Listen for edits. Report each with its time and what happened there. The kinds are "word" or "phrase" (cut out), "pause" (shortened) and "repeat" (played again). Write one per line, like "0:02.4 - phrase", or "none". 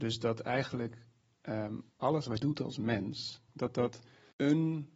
0:01.9 - pause
0:02.4 - word
0:03.5 - pause